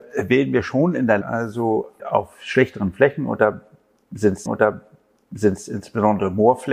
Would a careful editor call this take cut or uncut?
cut